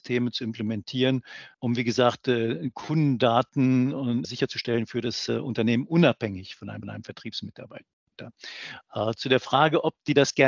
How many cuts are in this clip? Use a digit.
3